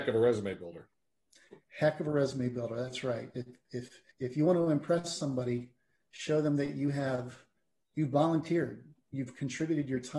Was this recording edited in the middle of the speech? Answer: yes; 1 cut; at 4.1 s

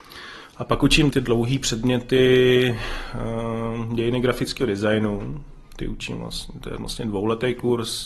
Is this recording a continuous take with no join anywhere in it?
no; 1 cut; at 1.1 s

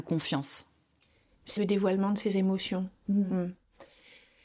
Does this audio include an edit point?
yes; 1 cut; at 1.6 s

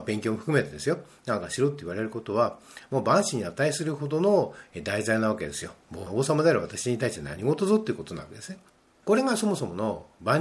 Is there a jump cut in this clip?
yes; 1 cut; at 8.7 s

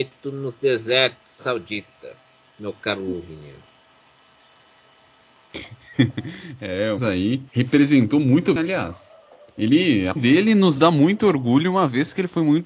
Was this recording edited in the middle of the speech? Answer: yes; 4 cuts; at 7.0 s, 7.5 s, 8.6 s, 10.2 s

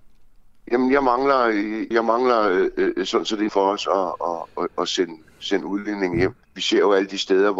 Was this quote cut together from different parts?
yes; 3 cuts; at 1.9 s, 3.5 s, 6.4 s

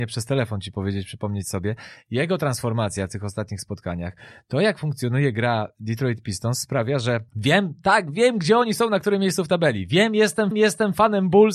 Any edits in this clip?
yes; 2 cuts; at 7.3 s, 10.5 s

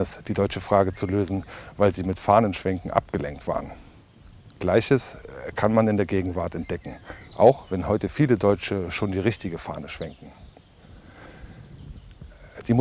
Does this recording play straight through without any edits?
yes; 0 cuts

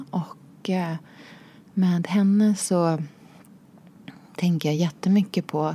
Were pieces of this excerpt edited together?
no; 0 cuts

